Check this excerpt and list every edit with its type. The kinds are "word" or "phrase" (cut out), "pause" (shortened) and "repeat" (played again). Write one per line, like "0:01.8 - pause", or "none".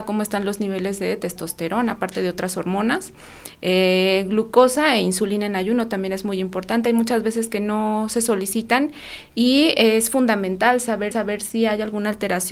0:11.1 - repeat